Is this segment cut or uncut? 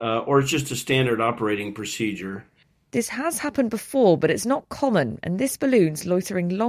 uncut